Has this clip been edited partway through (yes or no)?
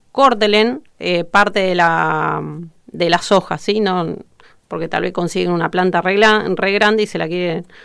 no